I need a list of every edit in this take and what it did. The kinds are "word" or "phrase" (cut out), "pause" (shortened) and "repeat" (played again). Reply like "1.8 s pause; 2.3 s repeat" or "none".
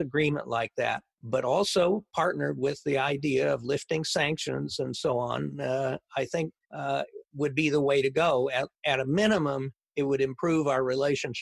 1.1 s pause; 6.6 s pause

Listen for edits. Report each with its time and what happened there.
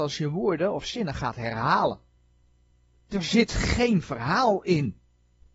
none

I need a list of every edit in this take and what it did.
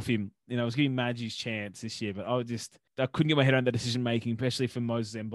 2.9 s pause

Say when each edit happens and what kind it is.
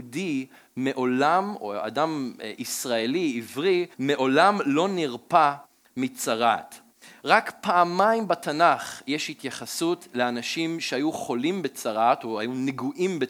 3.9 s pause

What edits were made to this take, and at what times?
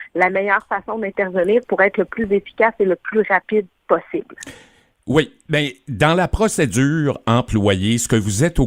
none

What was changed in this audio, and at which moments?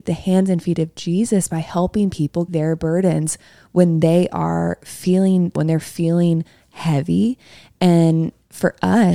2.5 s word; 5.6 s word

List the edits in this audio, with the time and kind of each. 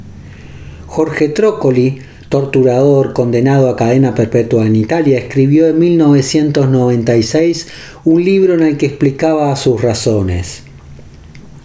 none

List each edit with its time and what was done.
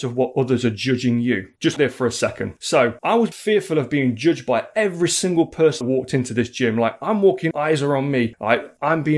1.8 s word; 3.3 s phrase; 5.8 s word; 7.5 s word

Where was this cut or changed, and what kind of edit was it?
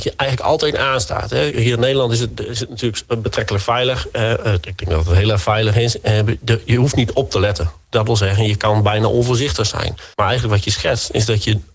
10.1 s pause

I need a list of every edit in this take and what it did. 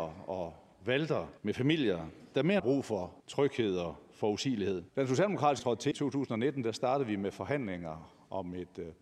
1.4 s pause; 2.6 s phrase; 3.2 s pause; 4.9 s pause; 5.6 s word; 5.9 s word

